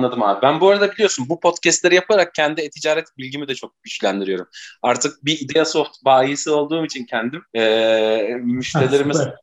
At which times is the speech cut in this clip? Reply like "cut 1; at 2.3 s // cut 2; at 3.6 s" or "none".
cut 1; at 7.5 s